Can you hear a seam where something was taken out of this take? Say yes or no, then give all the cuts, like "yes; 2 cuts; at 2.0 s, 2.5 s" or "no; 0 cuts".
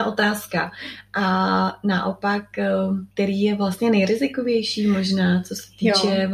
yes; 1 cut; at 3.1 s